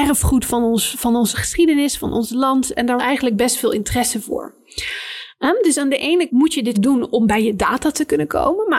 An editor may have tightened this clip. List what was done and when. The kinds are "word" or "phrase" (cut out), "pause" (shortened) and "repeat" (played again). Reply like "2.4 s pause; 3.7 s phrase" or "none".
3.0 s word; 6.3 s word; 6.7 s word

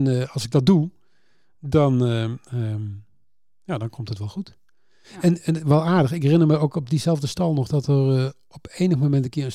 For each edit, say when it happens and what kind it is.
none

